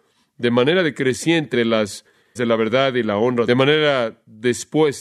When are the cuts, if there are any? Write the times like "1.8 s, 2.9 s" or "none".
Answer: 1.5 s, 2.4 s, 3.5 s